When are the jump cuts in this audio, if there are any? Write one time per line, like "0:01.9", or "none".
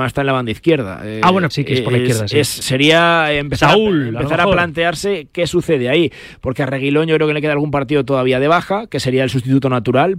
0:01.5
0:02.6